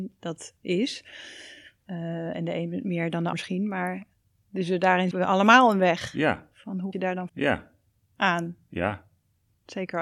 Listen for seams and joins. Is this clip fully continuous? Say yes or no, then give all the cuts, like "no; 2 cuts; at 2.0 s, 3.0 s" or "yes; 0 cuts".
no; 4 cuts; at 3.3 s, 5.1 s, 6.9 s, 7.3 s